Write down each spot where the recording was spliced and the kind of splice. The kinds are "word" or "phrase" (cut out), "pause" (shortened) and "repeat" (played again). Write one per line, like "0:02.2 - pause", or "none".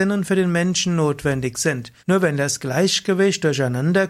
0:02.0 - pause